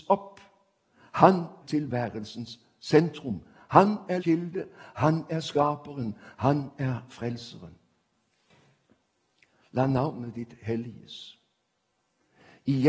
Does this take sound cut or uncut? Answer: cut